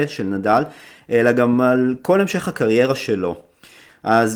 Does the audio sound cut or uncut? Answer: uncut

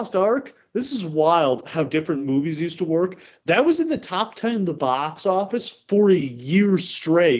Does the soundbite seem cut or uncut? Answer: uncut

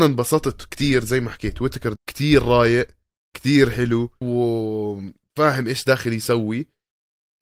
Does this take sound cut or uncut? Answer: cut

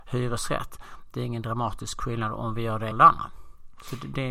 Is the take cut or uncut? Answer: cut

